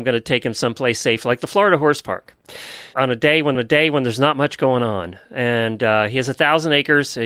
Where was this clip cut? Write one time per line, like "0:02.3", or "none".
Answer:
0:02.9
0:03.5